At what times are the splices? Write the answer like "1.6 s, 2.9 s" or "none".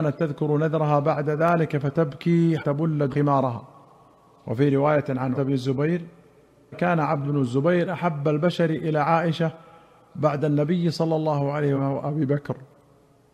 2.6 s, 3.1 s, 5.3 s, 6.7 s, 7.2 s, 11.7 s